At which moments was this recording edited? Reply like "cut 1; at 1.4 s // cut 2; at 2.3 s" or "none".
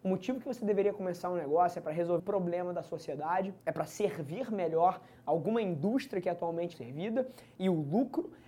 cut 1; at 2.2 s // cut 2; at 3.6 s // cut 3; at 6.7 s